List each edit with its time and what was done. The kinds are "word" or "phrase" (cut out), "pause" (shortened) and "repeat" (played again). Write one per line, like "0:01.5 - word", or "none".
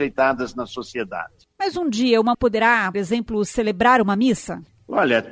0:02.3 - word
0:02.9 - word